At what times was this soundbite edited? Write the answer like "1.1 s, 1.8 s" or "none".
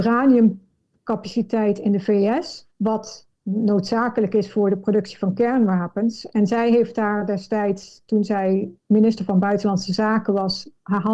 2.7 s, 8.8 s

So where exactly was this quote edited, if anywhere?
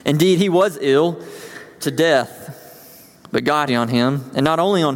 1.8 s, 3.7 s

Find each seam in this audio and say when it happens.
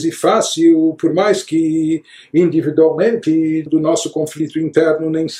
3.7 s

